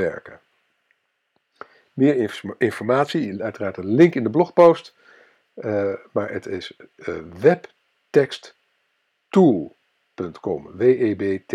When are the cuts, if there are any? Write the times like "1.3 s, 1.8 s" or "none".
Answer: none